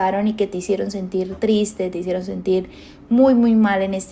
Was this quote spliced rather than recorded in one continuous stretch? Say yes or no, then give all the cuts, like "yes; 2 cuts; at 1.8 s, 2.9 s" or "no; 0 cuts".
no; 0 cuts